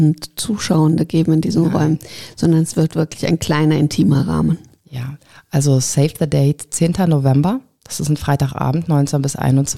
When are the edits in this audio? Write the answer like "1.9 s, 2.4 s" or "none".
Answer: none